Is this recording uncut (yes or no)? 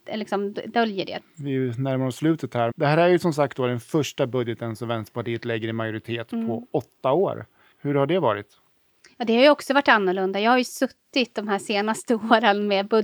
no